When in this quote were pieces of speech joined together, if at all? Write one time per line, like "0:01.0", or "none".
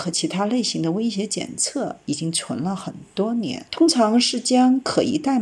0:03.7